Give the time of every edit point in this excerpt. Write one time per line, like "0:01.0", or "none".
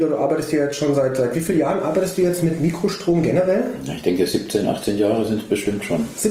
none